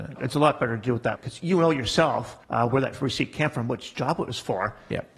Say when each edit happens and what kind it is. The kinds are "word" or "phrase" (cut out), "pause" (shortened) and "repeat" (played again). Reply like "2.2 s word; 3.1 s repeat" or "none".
1.2 s word; 2.4 s pause